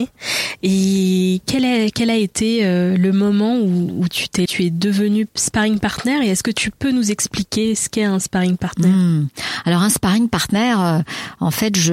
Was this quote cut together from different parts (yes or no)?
yes